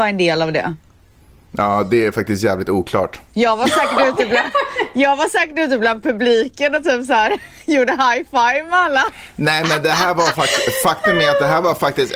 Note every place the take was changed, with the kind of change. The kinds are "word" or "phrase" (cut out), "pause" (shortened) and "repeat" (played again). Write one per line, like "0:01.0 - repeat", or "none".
none